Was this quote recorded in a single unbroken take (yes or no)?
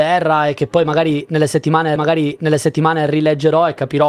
no